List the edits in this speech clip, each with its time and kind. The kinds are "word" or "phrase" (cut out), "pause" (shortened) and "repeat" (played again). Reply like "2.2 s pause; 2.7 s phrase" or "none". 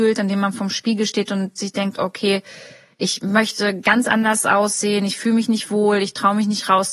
none

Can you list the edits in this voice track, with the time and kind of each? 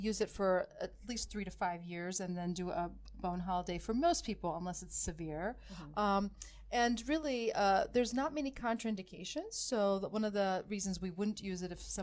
none

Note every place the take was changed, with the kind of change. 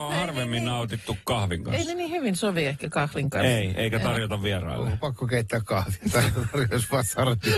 none

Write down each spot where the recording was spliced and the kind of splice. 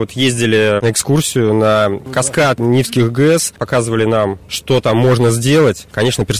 none

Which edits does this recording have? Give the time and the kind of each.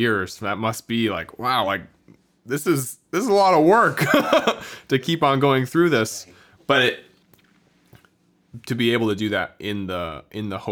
none

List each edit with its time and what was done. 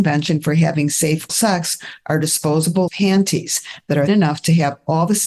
1.3 s word; 2.9 s word; 4.1 s word

